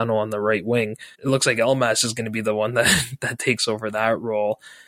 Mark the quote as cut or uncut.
cut